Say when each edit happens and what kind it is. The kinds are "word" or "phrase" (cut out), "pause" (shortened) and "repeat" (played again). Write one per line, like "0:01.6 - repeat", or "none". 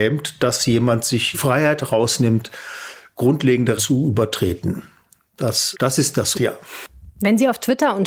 0:01.3 - word
0:03.8 - word
0:05.7 - word
0:06.3 - word

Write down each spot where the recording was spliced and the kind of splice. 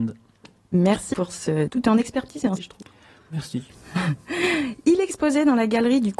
0:01.1 - word
0:01.7 - word
0:02.6 - word

